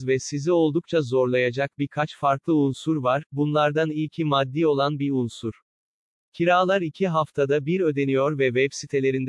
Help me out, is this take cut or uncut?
uncut